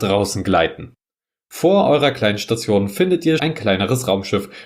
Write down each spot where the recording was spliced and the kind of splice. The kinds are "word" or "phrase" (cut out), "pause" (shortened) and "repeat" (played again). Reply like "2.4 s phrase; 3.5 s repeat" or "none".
3.4 s word